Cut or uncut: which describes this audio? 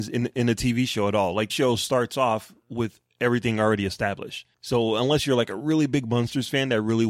cut